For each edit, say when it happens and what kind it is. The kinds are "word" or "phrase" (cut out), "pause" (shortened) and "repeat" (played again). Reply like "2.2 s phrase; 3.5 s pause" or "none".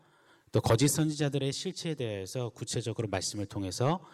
none